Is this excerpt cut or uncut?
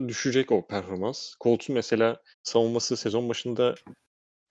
cut